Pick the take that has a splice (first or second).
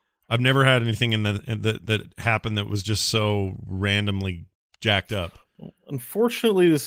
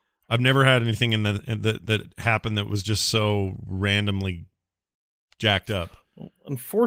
first